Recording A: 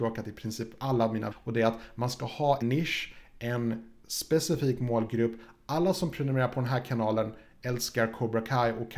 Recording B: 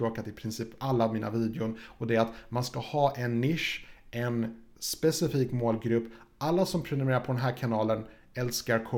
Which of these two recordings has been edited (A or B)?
A